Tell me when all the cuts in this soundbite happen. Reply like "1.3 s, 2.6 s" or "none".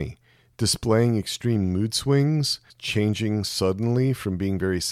2.7 s